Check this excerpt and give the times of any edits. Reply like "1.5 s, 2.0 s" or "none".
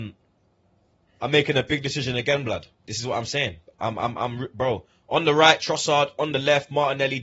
2.7 s